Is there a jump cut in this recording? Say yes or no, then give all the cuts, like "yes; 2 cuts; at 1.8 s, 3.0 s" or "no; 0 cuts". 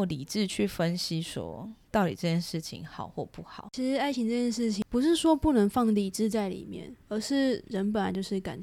yes; 2 cuts; at 1.8 s, 7.0 s